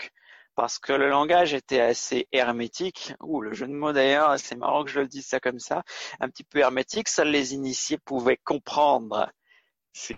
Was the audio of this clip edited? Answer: no; 0 cuts

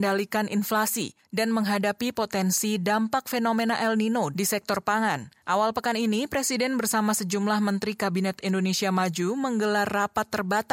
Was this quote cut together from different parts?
yes; 1 cut; at 5.4 s

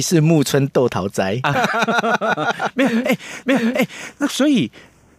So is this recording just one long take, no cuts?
no; 2 cuts; at 1.5 s, 3.4 s

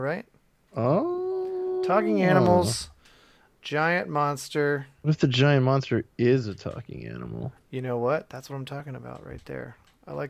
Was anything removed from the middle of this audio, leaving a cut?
no; 0 cuts

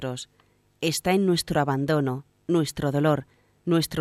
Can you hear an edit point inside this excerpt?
no; 0 cuts

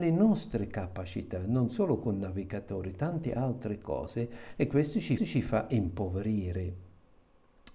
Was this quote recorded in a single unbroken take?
no; 1 cut; at 5.2 s

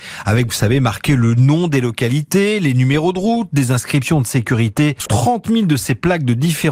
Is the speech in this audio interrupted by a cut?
yes; 1 cut; at 5.1 s

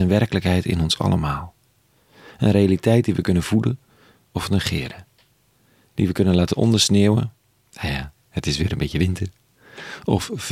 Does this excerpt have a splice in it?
no; 0 cuts

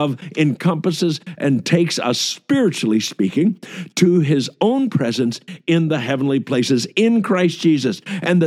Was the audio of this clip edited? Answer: no; 0 cuts

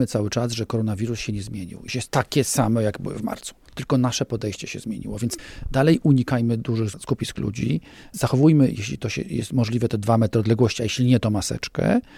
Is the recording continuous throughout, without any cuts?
yes; 0 cuts

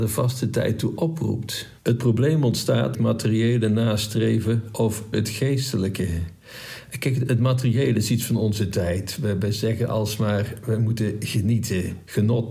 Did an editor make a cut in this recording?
yes; 4 cuts; at 1.8 s, 2.9 s, 5.1 s, 7.3 s

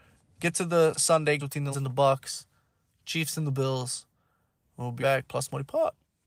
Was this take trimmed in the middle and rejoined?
yes; 4 cuts; at 0.9 s, 1.4 s, 1.7 s, 5.0 s

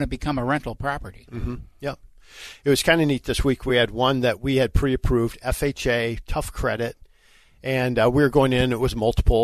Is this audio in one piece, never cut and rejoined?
yes; 0 cuts

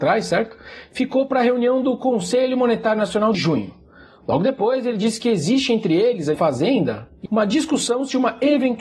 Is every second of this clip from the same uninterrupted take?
no; 3 cuts; at 3.3 s, 6.3 s, 7.3 s

